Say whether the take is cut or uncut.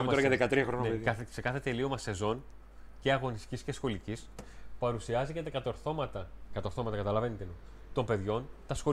uncut